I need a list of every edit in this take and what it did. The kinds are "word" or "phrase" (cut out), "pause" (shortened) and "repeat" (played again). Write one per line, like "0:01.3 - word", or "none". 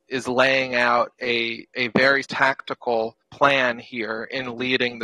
0:02.2 - word
0:03.2 - pause